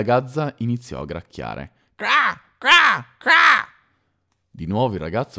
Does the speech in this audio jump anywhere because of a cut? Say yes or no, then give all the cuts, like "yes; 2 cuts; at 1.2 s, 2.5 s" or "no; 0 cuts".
no; 0 cuts